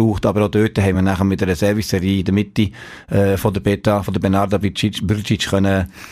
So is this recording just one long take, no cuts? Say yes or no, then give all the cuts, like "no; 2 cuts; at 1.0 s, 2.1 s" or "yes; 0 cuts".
yes; 0 cuts